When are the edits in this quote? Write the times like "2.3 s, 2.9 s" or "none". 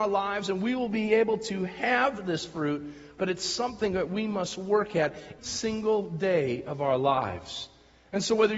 5.4 s